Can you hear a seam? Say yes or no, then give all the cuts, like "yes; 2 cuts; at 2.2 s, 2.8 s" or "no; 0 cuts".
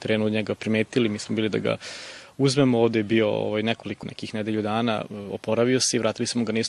yes; 1 cut; at 4.0 s